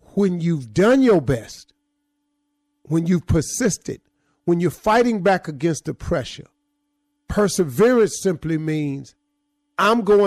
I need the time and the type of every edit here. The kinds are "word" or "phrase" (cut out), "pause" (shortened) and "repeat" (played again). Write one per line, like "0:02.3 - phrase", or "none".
none